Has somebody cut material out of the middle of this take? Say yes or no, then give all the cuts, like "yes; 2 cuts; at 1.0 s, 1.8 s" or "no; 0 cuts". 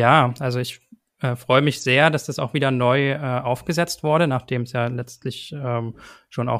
no; 0 cuts